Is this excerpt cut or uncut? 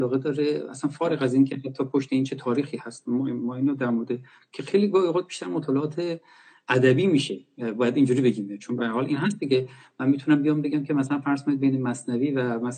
uncut